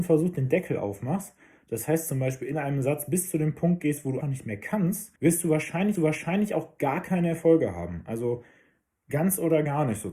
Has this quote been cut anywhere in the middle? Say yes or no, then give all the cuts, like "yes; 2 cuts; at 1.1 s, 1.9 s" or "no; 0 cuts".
yes; 3 cuts; at 4.2 s, 5.2 s, 5.9 s